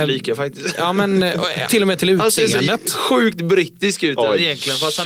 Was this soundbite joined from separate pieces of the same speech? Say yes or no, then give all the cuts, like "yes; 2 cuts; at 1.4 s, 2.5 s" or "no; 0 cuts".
yes; 1 cut; at 1.7 s